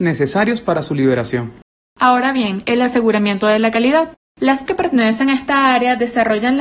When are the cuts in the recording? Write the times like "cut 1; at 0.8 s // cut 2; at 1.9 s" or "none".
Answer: cut 1; at 4.7 s